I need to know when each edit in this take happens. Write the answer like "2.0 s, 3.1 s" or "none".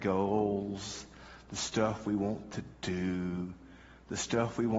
none